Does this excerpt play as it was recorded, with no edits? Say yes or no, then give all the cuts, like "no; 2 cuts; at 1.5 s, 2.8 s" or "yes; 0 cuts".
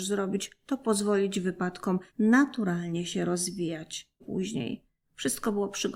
no; 3 cuts; at 2.1 s, 4.2 s, 5.0 s